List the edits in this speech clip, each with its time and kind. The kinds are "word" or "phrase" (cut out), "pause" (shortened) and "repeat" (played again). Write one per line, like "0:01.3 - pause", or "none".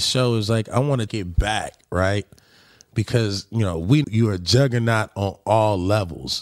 0:01.1 - word
0:04.0 - word